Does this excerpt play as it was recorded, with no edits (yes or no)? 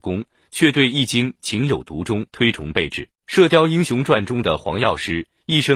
no